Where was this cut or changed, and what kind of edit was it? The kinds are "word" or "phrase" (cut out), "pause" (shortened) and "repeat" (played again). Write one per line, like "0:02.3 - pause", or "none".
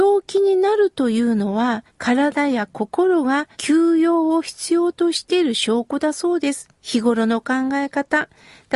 0:01.9 - pause
0:03.5 - pause
0:06.7 - pause